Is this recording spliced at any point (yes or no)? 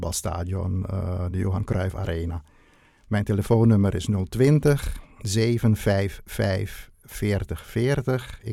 no